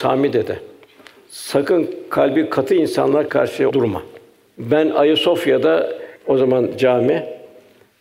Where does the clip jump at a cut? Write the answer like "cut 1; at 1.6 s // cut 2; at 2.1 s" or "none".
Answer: cut 1; at 3.3 s // cut 2; at 3.7 s // cut 3; at 6.2 s